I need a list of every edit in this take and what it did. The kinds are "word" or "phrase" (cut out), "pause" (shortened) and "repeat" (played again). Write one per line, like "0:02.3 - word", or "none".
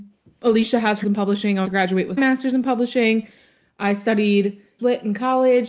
0:01.0 - word
0:01.6 - word
0:02.2 - word
0:04.8 - word